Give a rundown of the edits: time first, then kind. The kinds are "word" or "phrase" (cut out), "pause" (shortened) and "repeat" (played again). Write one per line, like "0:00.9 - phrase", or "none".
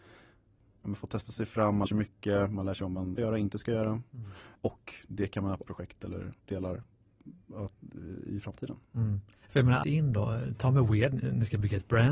0:01.9 - word
0:03.2 - word
0:05.6 - phrase
0:06.4 - pause
0:09.8 - word